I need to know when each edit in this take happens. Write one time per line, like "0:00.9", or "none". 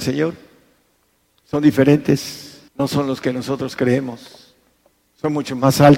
0:02.7